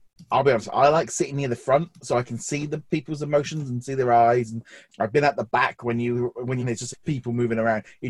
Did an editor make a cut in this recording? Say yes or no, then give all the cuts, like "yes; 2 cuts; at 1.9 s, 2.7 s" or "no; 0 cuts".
yes; 3 cuts; at 4.9 s, 6.6 s, 6.9 s